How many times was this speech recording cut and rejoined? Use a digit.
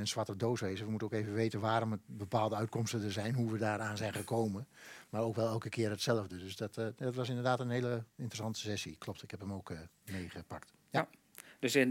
1